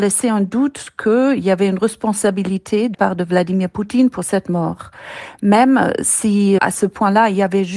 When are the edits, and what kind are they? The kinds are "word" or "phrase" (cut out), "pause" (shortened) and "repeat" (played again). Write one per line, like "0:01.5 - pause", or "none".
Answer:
0:02.9 - word
0:06.6 - word